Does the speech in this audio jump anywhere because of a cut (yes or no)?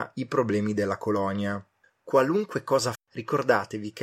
yes